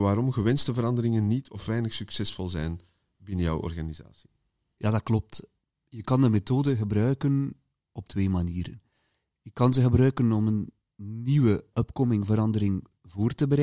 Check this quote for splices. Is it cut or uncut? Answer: uncut